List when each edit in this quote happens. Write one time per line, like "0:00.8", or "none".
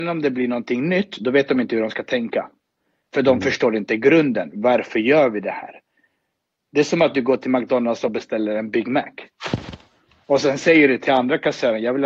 none